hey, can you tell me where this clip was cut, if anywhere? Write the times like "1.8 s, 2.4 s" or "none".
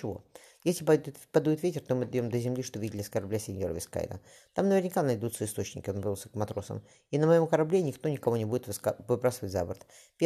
none